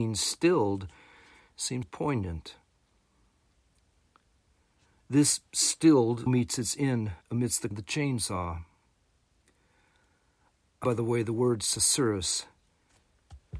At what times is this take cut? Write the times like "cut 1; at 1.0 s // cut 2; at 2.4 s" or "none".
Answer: cut 1; at 1.8 s // cut 2; at 6.3 s // cut 3; at 7.2 s // cut 4; at 7.7 s // cut 5; at 10.8 s